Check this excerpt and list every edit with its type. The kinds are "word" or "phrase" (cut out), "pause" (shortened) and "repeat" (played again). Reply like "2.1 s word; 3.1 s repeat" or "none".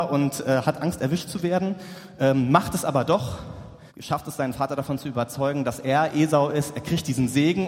3.9 s pause

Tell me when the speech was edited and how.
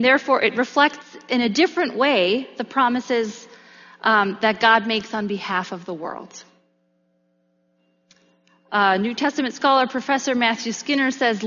none

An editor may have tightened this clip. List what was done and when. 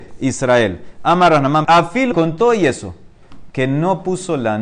1.6 s word; 2.1 s word

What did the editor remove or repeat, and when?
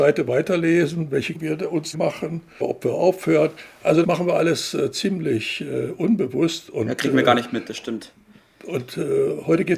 1.3 s word; 1.9 s word; 2.6 s word; 4.0 s word

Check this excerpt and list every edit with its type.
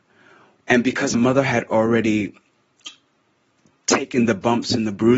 1.1 s word

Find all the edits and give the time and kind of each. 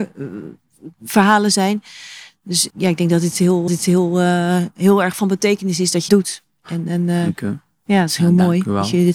0.9 s pause; 2.7 s word; 3.7 s repeat; 6.1 s word

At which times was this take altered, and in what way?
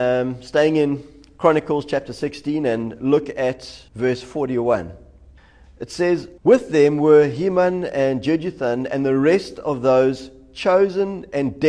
3.9 s pause; 5.4 s pause; 6.4 s pause

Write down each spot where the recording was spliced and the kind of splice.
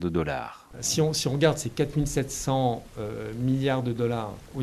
none

